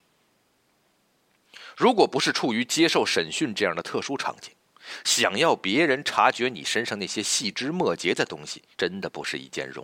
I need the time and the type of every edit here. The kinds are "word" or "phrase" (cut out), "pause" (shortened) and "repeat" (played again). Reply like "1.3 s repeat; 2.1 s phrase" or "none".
8.7 s pause